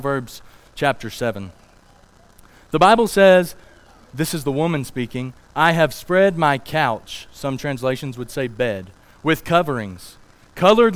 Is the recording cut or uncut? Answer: uncut